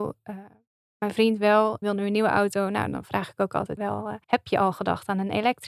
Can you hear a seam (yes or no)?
yes